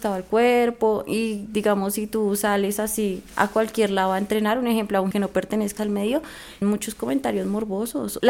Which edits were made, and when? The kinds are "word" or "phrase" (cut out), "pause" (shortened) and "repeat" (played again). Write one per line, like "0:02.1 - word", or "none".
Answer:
0:05.1 - word
0:05.8 - word
0:06.6 - word